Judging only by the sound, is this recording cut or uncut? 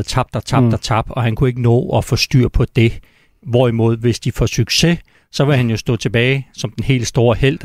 uncut